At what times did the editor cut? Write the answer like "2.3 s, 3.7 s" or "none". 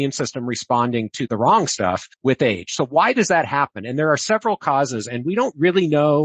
1.3 s, 2.1 s